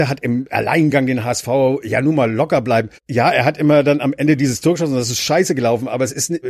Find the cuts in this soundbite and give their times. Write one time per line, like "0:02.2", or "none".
0:03.0